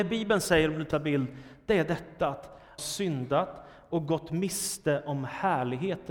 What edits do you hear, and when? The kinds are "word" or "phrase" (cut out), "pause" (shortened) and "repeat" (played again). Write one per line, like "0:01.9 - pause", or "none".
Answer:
0:00.9 - word
0:02.8 - phrase